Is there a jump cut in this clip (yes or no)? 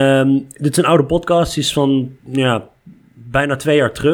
yes